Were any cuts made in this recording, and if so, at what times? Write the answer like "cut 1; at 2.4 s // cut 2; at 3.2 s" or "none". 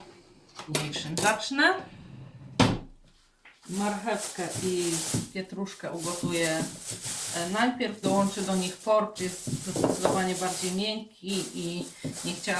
cut 1; at 8.0 s // cut 2; at 9.2 s

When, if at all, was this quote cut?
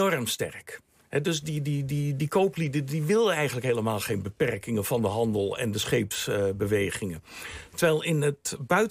none

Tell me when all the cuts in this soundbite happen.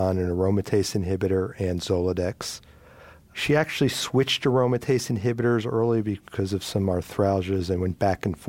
none

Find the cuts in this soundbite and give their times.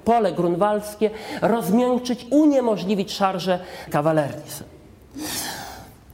cut 1; at 2.3 s // cut 2; at 3.9 s

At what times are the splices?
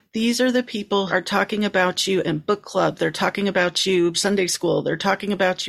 cut 1; at 1.1 s // cut 2; at 4.1 s

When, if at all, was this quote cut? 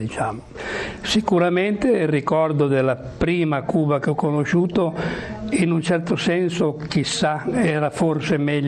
none

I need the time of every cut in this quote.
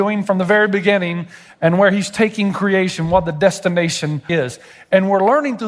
cut 1; at 4.3 s

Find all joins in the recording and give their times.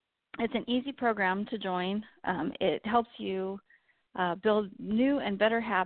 none

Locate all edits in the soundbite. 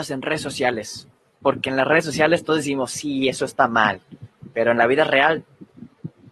none

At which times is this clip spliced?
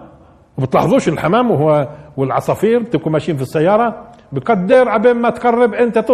none

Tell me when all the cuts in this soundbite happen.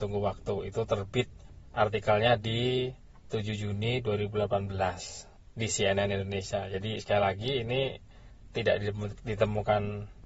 none

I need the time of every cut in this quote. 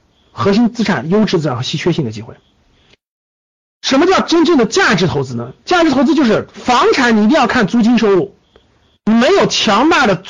none

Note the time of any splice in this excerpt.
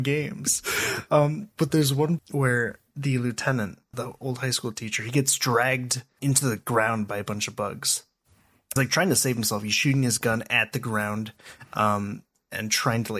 cut 1; at 2.2 s // cut 2; at 3.9 s // cut 3; at 6.2 s // cut 4; at 8.8 s

